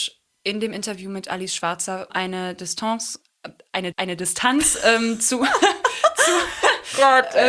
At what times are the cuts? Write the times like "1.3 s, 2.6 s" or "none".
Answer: 2.1 s, 3.9 s